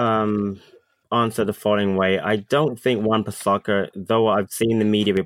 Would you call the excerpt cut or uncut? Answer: uncut